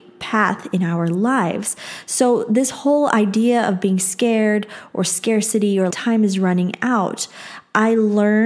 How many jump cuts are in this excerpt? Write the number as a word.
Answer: one